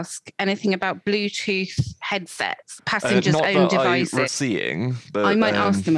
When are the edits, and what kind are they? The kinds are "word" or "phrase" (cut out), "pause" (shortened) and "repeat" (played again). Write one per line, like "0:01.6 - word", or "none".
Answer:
0:02.8 - word
0:04.3 - word